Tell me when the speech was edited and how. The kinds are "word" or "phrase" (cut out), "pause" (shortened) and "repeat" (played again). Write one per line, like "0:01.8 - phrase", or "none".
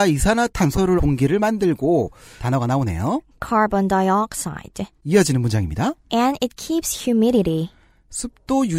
0:01.0 - phrase
0:02.4 - word
0:05.0 - pause
0:06.0 - pause